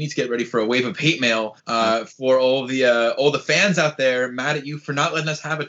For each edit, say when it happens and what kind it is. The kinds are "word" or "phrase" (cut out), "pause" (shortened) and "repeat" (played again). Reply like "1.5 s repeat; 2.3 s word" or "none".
1.6 s pause